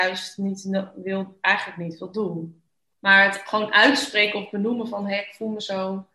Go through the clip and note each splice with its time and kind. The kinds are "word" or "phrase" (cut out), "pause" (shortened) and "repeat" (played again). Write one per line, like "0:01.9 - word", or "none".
none